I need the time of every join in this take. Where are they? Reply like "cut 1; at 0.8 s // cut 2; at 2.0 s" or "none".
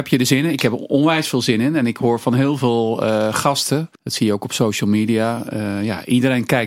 cut 1; at 4.0 s